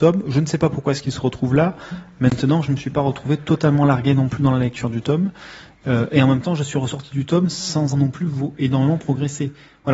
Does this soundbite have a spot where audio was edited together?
yes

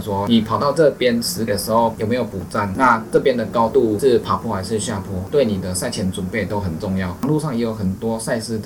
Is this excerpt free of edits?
no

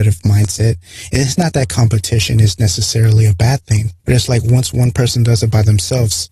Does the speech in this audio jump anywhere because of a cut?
yes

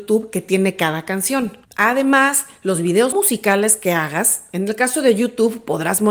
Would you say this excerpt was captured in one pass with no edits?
no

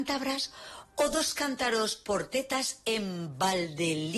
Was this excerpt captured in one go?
yes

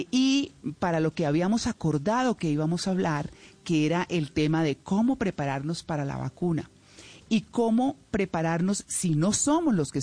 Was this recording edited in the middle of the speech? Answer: no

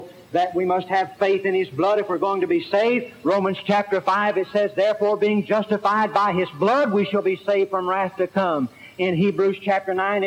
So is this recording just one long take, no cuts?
yes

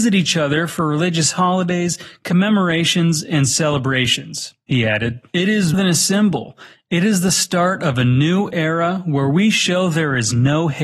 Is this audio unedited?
no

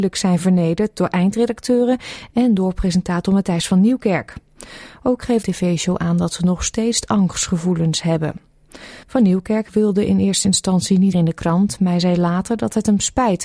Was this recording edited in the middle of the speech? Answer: yes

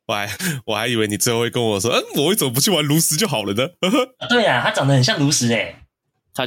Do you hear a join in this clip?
no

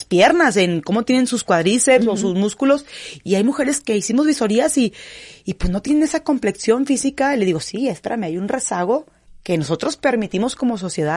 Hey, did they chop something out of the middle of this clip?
yes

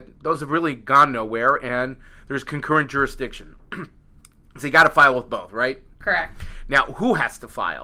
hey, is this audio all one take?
yes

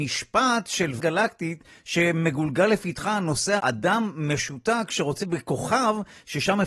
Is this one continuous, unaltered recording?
no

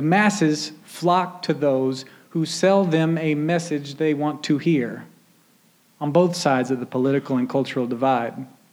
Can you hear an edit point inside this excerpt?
no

